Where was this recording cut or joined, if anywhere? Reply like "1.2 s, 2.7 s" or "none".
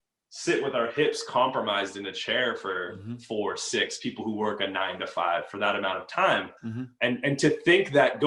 6.6 s